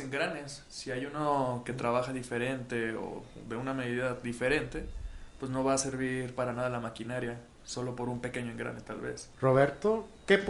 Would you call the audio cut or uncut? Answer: cut